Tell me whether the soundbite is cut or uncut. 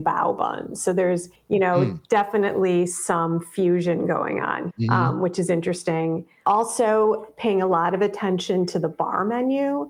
cut